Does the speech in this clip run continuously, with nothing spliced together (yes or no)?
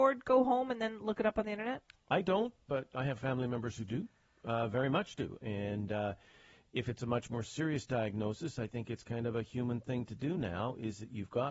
yes